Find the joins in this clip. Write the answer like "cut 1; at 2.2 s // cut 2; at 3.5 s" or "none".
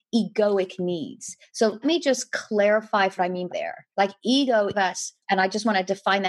cut 1; at 1.8 s // cut 2; at 3.2 s // cut 3; at 3.5 s // cut 4; at 3.9 s // cut 5; at 4.7 s // cut 6; at 5.2 s